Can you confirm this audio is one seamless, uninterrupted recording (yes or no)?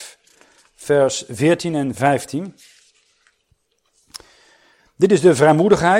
no